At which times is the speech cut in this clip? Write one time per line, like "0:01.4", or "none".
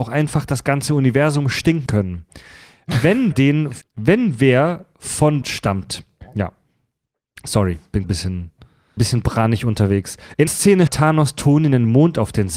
0:01.9
0:03.3
0:03.8
0:05.4
0:08.0
0:09.0
0:10.5
0:10.9